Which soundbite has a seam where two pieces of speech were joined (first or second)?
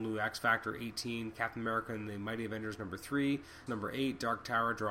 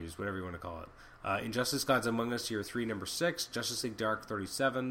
first